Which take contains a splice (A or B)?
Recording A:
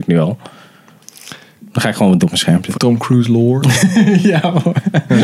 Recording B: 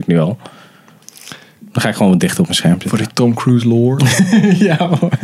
A